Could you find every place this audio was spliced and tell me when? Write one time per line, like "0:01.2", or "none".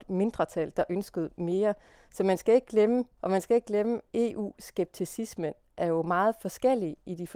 0:03.2
0:04.1